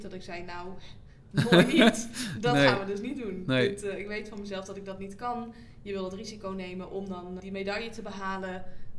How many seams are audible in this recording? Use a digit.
1